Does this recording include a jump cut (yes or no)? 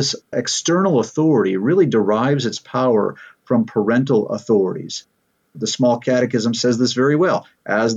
no